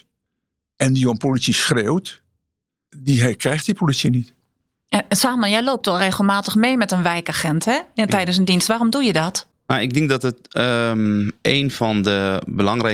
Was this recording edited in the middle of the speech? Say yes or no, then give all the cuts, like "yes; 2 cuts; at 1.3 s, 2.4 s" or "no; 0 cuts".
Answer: no; 0 cuts